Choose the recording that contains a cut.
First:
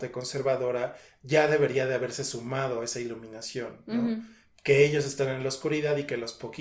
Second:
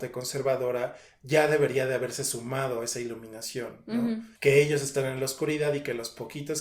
second; 1 cut; at 4.4 s

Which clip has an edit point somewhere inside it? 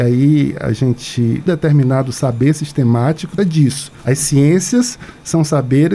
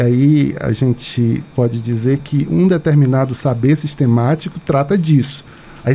first; 3 cuts; at 1.5 s, 3.4 s, 4.0 s

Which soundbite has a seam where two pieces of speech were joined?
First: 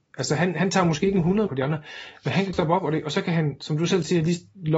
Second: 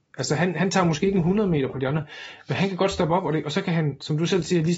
first; 2 cuts; at 1.5 s, 2.5 s

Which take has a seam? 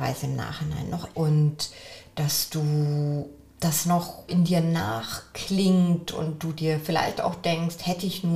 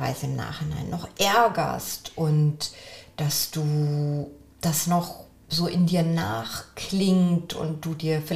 first; 2 cuts; at 1.1 s, 4.3 s

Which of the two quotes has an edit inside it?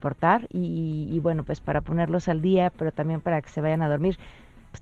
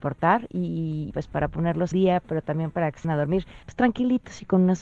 second; 4 cuts; at 1.1 s, 1.9 s, 3.0 s, 3.6 s

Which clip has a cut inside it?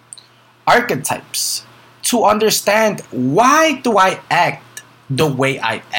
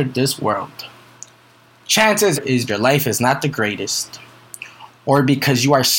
second; 2 cuts; at 2.4 s, 2.7 s

